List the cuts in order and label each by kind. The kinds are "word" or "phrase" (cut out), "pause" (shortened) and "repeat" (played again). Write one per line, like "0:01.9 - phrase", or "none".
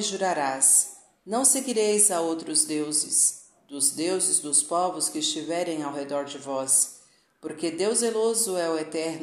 none